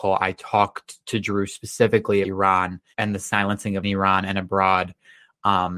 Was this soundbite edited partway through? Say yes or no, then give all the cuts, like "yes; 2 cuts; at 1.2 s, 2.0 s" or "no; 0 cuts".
yes; 3 cuts; at 2.2 s, 2.9 s, 3.8 s